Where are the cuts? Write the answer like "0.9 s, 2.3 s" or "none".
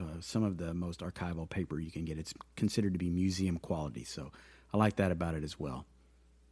none